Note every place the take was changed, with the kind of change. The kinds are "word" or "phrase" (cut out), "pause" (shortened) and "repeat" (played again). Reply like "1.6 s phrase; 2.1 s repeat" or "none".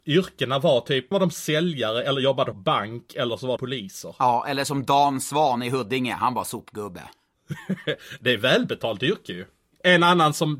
1.1 s word; 2.5 s word; 3.6 s word